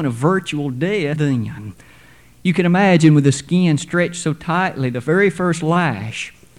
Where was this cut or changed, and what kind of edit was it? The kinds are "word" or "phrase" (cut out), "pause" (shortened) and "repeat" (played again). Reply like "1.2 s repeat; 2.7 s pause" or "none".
1.2 s word